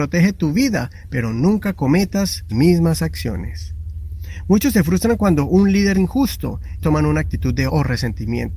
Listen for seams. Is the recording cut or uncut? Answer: cut